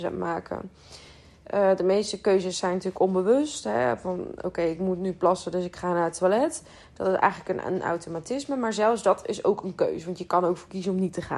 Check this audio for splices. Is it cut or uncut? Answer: uncut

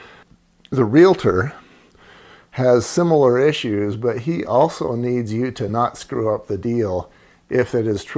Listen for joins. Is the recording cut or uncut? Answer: uncut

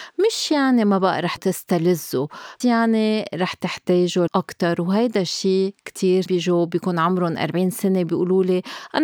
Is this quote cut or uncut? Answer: cut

